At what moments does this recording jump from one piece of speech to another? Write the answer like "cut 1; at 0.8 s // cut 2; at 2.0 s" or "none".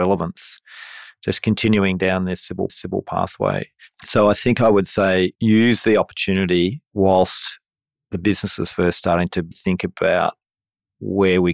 cut 1; at 2.7 s // cut 2; at 5.4 s // cut 3; at 6.9 s // cut 4; at 9.5 s

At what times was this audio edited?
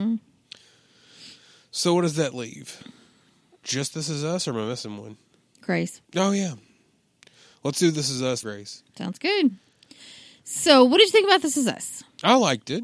cut 1; at 6.0 s // cut 2; at 8.4 s

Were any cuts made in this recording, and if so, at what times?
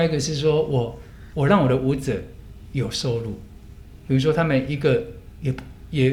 cut 1; at 1.3 s

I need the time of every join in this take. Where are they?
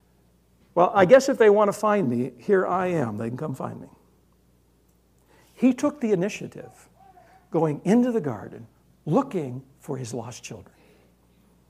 none

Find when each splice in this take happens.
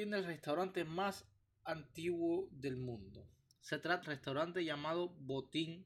cut 1; at 4.0 s

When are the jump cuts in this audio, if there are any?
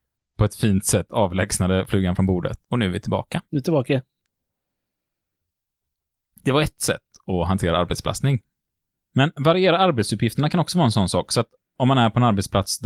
cut 1; at 2.6 s // cut 2; at 3.4 s // cut 3; at 8.8 s

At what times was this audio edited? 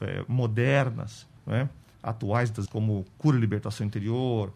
cut 1; at 1.4 s // cut 2; at 2.7 s

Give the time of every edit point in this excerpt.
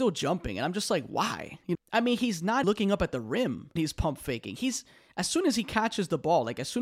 cut 1; at 1.7 s // cut 2; at 2.6 s // cut 3; at 3.8 s

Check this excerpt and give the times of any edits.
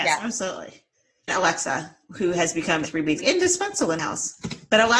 cut 1; at 1.3 s // cut 2; at 2.8 s // cut 3; at 3.2 s // cut 4; at 4.0 s

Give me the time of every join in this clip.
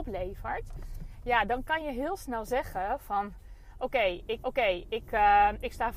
cut 1; at 4.4 s

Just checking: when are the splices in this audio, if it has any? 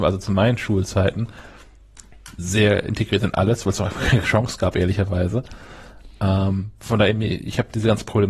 cut 1; at 2.4 s // cut 2; at 4.2 s

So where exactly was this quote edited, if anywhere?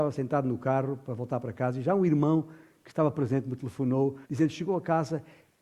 cut 1; at 4.2 s

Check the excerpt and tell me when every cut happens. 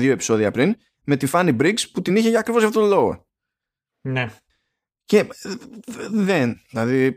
none

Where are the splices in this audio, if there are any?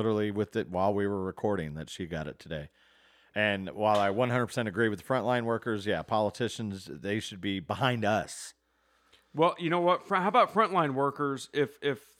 none

